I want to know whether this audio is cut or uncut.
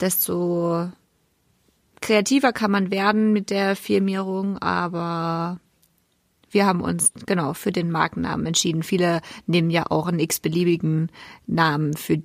uncut